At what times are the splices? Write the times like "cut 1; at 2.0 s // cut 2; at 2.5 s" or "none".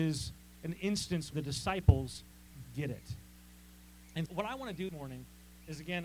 cut 1; at 1.3 s // cut 2; at 2.6 s // cut 3; at 4.3 s // cut 4; at 4.9 s

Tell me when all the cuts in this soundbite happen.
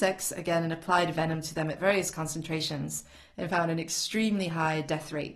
none

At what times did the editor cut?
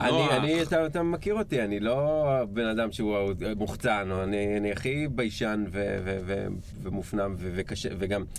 cut 1; at 7.4 s

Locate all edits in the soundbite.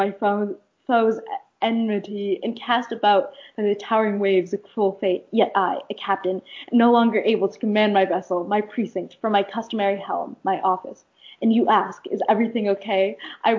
none

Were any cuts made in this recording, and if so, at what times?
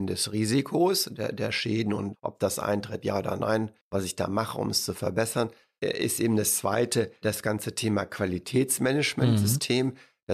cut 1; at 3.8 s

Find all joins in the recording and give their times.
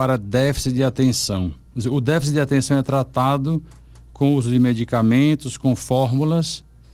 none

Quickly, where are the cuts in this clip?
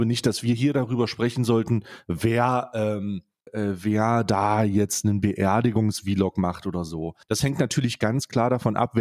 cut 1; at 3.5 s // cut 2; at 7.2 s

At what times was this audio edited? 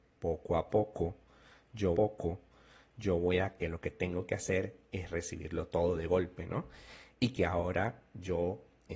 cut 1; at 1.9 s // cut 2; at 3.6 s

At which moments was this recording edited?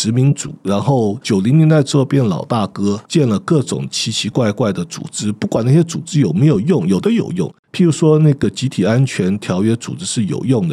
cut 1; at 3.0 s

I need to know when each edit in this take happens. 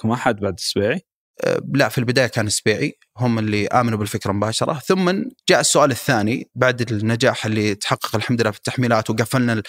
cut 1; at 5.4 s

